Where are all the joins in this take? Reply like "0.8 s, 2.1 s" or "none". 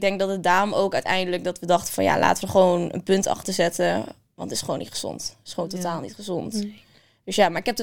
none